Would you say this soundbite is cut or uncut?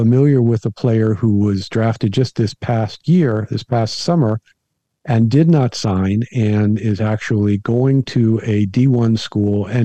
uncut